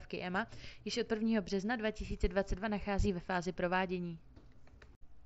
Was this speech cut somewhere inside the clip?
no; 0 cuts

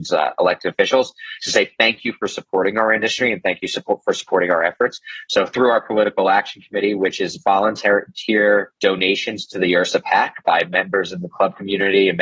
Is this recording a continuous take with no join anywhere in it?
no; 1 cut; at 8.8 s

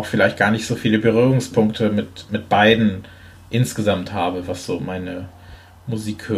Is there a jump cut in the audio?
no; 0 cuts

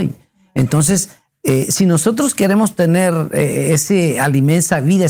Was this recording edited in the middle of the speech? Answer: no; 0 cuts

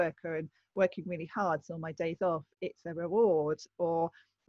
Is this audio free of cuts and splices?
yes; 0 cuts

